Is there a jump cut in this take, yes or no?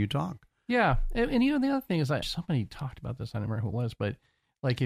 yes